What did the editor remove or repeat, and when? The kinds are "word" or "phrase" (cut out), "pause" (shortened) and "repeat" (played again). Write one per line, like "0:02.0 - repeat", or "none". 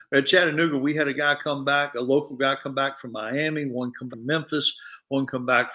0:04.1 - word